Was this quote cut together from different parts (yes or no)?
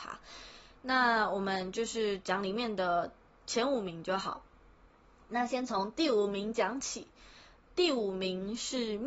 no